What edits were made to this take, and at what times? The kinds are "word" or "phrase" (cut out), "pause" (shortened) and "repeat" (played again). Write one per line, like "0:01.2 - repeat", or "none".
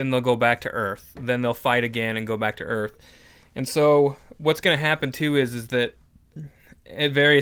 none